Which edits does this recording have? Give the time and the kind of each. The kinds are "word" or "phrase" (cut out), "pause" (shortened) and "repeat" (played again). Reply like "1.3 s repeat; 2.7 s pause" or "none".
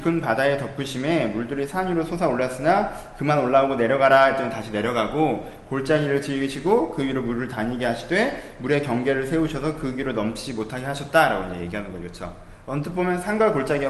none